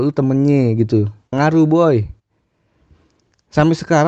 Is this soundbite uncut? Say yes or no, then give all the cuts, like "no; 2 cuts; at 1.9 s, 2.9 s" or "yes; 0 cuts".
no; 1 cut; at 1.3 s